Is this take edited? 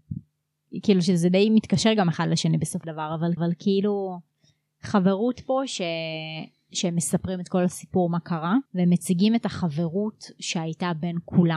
yes; 3 cuts; at 2.8 s, 3.4 s, 8.7 s

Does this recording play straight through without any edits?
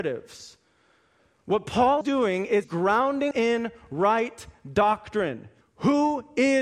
no; 4 cuts; at 2.0 s, 2.6 s, 3.3 s, 5.6 s

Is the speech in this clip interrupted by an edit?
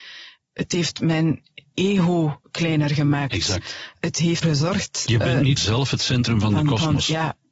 yes; 2 cuts; at 4.4 s, 5.6 s

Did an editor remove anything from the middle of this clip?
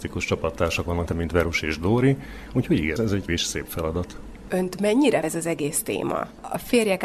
yes; 4 cuts; at 1.1 s, 3.0 s, 3.3 s, 5.2 s

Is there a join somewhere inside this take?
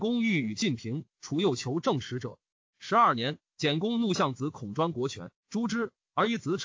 no; 0 cuts

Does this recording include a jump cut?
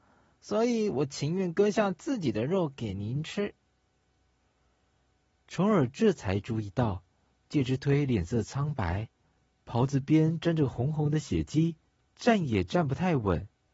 no; 0 cuts

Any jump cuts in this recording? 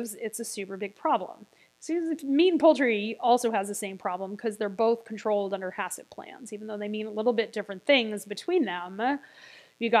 no; 0 cuts

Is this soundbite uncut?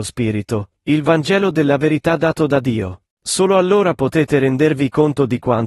no; 1 cut; at 3.1 s

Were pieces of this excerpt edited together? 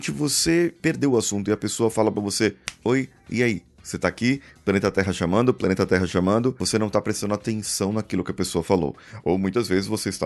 yes; 1 cut; at 2.8 s

